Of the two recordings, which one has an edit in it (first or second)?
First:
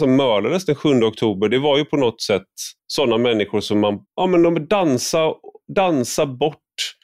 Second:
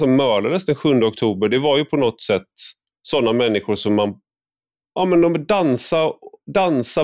first